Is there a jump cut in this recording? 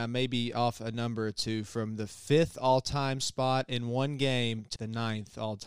yes; 1 cut; at 4.8 s

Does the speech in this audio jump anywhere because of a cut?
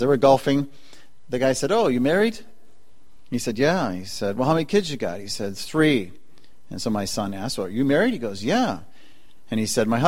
no; 0 cuts

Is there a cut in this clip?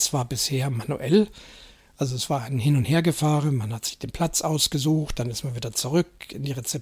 no; 0 cuts

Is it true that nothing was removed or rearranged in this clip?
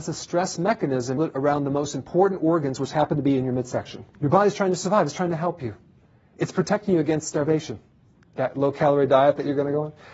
no; 2 cuts; at 1.2 s, 4.1 s

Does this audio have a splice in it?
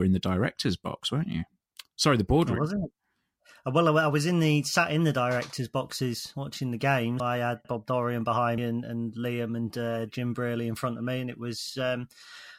yes; 3 cuts; at 7.2 s, 7.6 s, 8.6 s

